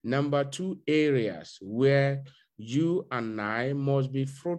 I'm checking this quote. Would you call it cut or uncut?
uncut